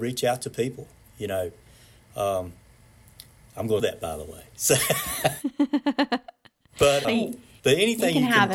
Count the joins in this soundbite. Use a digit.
2